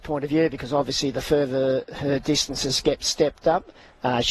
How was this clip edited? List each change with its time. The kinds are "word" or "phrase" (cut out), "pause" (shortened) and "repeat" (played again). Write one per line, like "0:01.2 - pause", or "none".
none